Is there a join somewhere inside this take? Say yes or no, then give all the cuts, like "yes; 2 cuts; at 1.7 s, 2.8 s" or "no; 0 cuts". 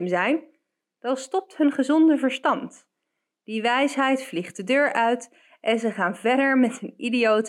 no; 0 cuts